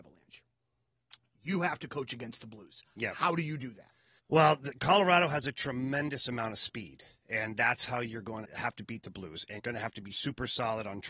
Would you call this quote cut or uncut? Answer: cut